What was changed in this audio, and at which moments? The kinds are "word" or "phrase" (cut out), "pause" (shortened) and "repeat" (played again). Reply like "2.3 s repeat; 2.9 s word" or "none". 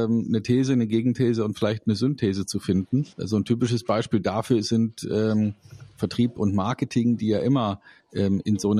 3.1 s pause